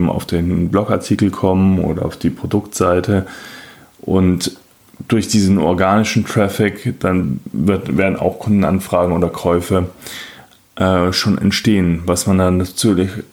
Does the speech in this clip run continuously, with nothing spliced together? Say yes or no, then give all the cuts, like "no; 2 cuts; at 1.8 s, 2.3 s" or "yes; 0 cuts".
yes; 0 cuts